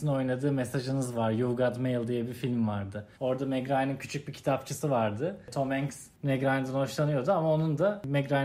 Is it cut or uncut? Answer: cut